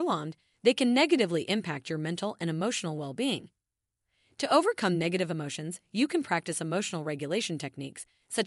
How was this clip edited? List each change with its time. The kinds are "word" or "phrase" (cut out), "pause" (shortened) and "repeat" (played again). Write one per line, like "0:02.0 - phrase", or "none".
none